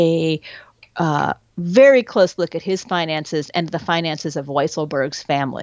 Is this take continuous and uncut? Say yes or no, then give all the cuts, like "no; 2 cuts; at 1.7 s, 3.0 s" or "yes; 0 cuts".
yes; 0 cuts